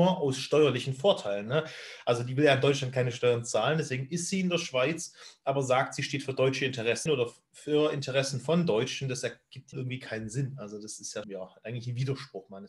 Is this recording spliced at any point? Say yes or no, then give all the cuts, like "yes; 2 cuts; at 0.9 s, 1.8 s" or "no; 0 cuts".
yes; 3 cuts; at 7.1 s, 9.7 s, 11.2 s